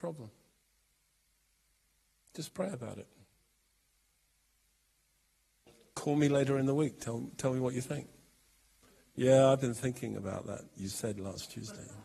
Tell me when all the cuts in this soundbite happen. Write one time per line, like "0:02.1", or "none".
none